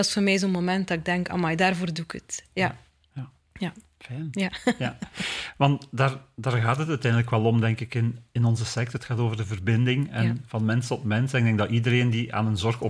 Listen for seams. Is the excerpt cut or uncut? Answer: uncut